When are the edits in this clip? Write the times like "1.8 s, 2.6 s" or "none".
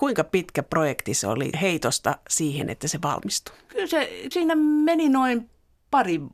1.5 s, 4.3 s